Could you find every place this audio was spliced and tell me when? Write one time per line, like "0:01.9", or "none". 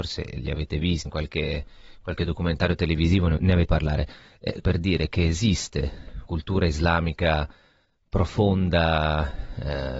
0:01.0
0:03.4
0:03.7
0:04.6
0:06.3